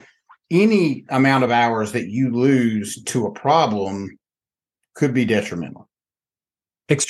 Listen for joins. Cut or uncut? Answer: uncut